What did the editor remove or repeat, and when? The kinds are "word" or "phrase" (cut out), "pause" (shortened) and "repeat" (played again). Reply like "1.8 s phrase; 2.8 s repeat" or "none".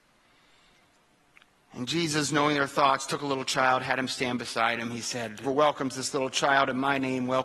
5.4 s phrase